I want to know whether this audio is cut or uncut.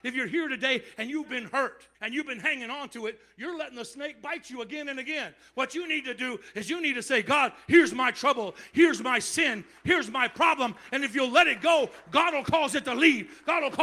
cut